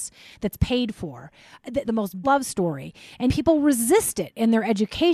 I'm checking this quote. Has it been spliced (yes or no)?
yes